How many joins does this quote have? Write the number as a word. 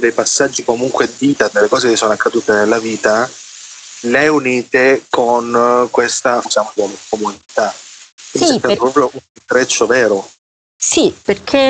five